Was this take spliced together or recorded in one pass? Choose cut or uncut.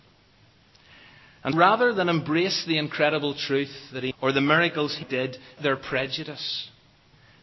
cut